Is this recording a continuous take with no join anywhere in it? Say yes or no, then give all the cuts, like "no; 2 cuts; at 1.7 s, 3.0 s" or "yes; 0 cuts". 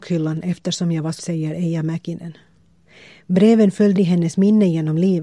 no; 2 cuts; at 1.2 s, 4.0 s